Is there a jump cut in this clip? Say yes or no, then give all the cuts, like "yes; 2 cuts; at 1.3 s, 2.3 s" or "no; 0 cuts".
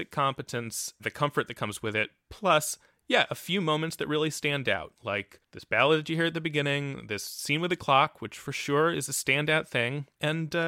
no; 0 cuts